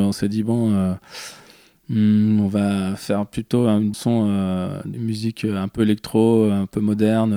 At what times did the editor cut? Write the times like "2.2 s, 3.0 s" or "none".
3.9 s, 4.9 s